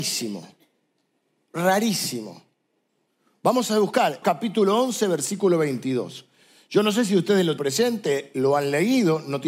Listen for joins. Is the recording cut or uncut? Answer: cut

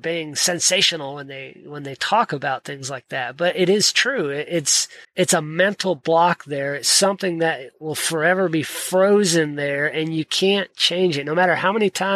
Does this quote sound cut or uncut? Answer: cut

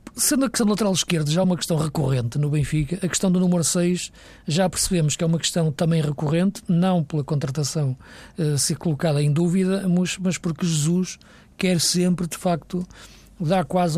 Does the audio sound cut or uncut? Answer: uncut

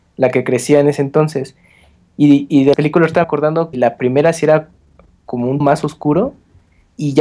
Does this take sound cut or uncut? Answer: cut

